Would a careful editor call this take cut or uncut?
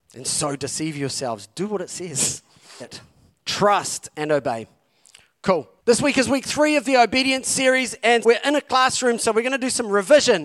cut